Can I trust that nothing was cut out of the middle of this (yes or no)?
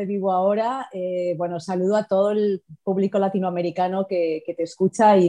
yes